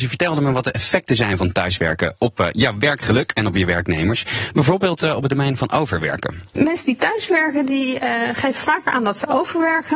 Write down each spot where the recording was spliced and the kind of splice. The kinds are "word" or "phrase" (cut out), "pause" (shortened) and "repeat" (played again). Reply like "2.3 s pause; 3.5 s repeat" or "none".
none